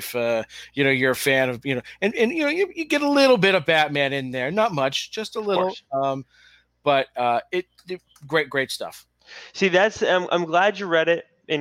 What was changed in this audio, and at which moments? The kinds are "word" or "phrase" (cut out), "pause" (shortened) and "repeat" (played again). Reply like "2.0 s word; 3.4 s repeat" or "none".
none